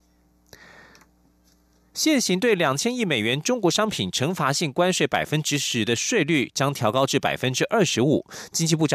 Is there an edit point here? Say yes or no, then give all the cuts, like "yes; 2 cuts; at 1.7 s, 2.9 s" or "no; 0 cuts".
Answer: no; 0 cuts